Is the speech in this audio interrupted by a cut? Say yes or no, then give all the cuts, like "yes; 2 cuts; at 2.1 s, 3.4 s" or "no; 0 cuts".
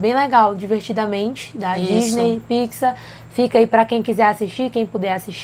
no; 0 cuts